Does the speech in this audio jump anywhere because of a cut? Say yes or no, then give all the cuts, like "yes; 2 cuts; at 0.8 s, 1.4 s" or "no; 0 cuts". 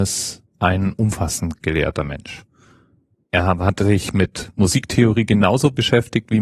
no; 0 cuts